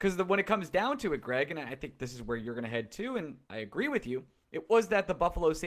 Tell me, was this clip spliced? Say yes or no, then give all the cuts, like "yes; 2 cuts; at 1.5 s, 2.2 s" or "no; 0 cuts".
yes; 1 cut; at 3.4 s